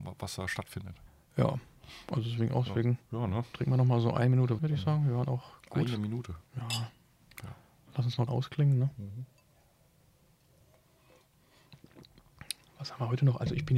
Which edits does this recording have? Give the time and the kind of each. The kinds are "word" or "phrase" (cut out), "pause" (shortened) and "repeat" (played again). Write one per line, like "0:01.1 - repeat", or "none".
0:01.1 - pause
0:02.7 - word
0:03.0 - pause
0:04.6 - word
0:06.4 - pause
0:08.3 - word